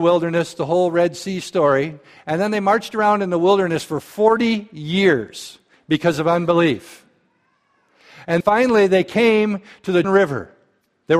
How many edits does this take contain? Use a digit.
2